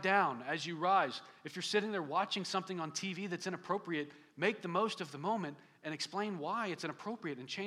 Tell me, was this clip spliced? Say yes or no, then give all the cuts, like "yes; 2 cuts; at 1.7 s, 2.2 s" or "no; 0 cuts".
no; 0 cuts